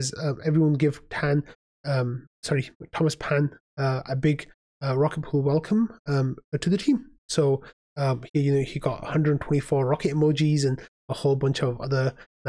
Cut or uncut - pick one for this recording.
uncut